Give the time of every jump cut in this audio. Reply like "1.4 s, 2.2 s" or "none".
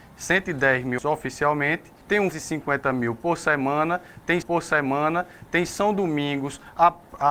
1.0 s, 2.0 s, 2.3 s, 4.4 s